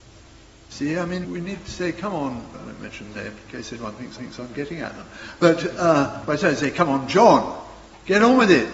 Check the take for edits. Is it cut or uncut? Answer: cut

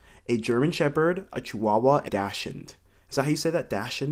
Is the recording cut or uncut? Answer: cut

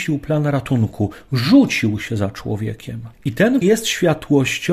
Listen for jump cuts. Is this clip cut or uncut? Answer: cut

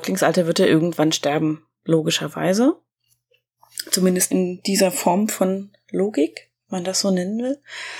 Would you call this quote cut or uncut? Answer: cut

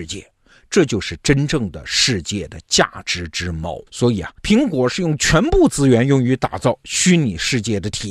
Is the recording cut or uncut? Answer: cut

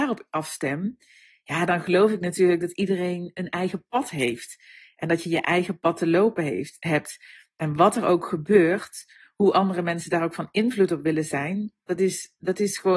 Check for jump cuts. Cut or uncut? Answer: uncut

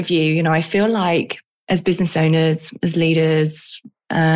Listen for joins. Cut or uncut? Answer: uncut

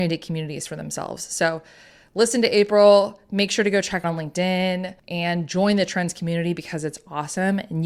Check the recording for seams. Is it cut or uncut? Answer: cut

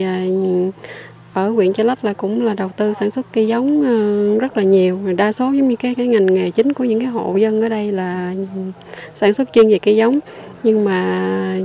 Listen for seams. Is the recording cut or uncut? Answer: cut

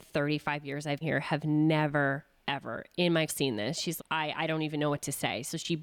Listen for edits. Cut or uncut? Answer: cut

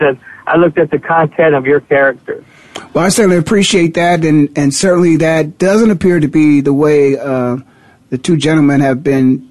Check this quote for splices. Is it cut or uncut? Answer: uncut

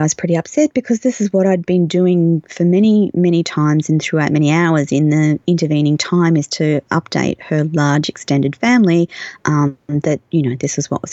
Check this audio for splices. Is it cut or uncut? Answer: uncut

